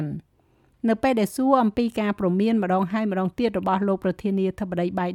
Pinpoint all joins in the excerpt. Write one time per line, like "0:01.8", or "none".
none